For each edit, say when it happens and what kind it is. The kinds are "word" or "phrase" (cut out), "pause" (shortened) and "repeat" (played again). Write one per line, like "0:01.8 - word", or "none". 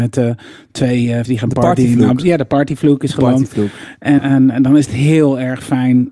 0:01.2 - phrase
0:04.2 - word
0:04.9 - word

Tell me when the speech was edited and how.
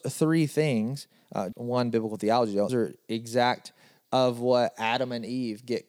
0:01.5 - word
0:02.7 - word
0:04.0 - word

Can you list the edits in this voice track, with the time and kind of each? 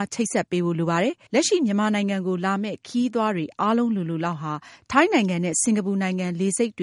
0:01.3 - pause

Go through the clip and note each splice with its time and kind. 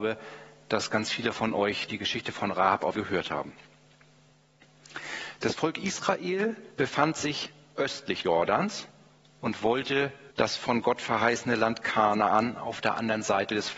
0:02.9 - phrase
0:06.7 - pause
0:08.2 - word
0:10.3 - pause

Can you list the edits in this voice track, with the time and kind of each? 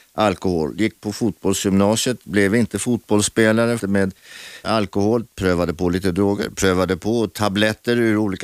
0:03.8 - word
0:04.6 - word

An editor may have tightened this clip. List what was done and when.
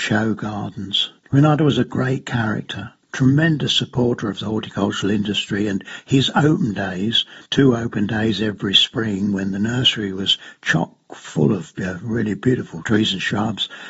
0:01.2 - pause
0:03.0 - pause
0:07.5 - pause

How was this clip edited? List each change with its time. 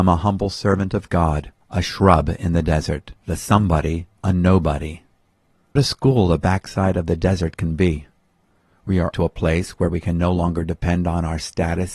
0:01.6 - pause
0:03.2 - pause
0:04.2 - phrase
0:05.8 - word
0:09.1 - phrase

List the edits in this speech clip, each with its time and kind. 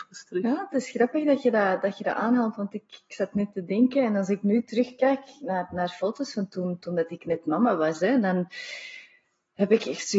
none

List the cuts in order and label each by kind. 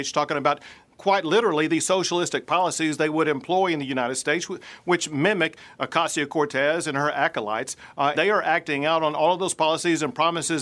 0:08.1 - word

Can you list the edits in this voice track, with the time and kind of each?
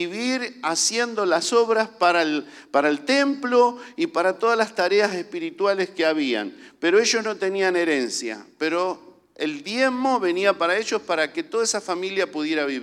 none

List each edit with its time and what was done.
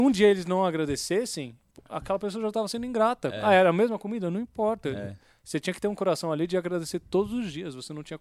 none

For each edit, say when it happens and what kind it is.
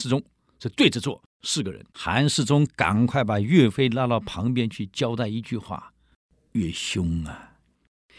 0:01.3 - pause
0:01.9 - pause

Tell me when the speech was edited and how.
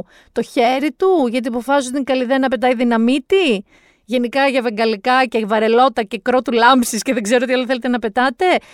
none

